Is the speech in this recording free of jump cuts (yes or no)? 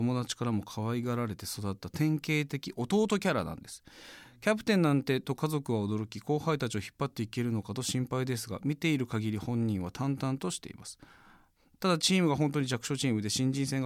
yes